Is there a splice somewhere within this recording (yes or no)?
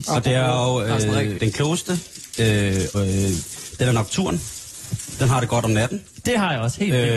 yes